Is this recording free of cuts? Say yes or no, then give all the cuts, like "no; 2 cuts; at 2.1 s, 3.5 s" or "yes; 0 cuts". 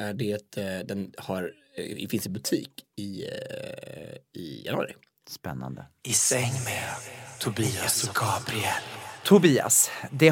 yes; 0 cuts